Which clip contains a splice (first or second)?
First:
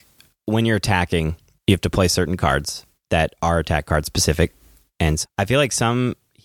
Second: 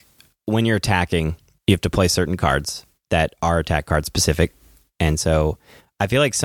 first